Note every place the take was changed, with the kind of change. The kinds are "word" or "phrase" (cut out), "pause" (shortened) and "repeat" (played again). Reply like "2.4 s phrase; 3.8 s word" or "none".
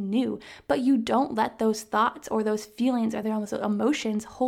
none